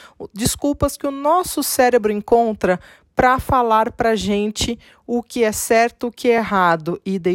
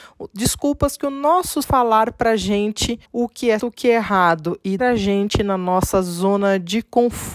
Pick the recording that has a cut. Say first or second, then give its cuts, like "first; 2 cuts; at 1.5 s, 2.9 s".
second; 4 cuts; at 1.6 s, 3.0 s, 3.6 s, 4.8 s